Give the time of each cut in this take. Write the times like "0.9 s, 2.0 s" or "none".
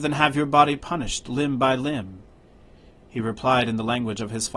none